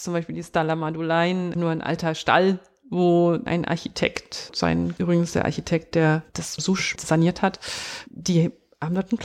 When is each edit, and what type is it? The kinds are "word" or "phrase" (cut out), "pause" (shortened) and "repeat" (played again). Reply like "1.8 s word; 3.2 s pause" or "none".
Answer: 1.5 s word; 4.5 s word; 5.0 s word; 6.6 s word; 7.0 s word